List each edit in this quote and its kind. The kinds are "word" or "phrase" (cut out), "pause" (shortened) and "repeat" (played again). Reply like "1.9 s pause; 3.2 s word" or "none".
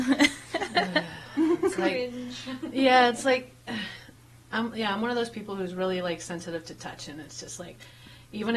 none